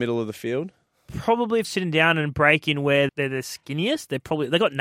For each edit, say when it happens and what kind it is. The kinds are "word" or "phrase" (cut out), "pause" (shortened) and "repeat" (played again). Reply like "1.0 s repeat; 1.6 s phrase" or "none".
1.6 s word; 3.1 s word

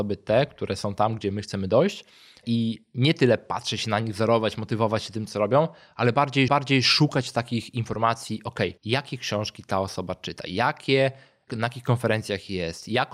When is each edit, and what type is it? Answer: 6.5 s repeat; 8.8 s pause

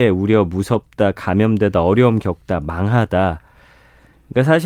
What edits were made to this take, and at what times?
none

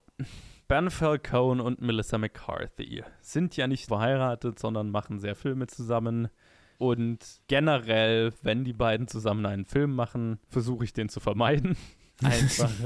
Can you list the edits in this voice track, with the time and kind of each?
3.9 s word; 5.3 s word

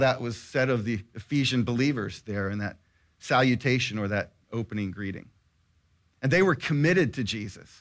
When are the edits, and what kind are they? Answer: none

